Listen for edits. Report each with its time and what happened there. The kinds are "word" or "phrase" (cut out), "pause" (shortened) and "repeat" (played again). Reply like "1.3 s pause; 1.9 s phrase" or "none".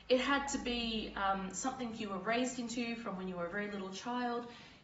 none